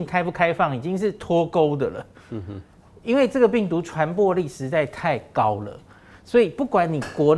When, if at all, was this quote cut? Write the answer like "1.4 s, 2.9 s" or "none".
none